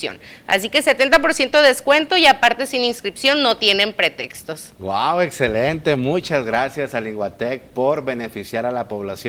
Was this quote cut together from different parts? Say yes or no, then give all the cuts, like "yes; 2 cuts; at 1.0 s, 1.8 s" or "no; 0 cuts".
no; 0 cuts